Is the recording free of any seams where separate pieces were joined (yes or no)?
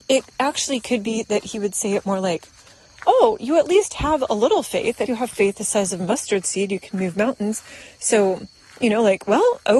no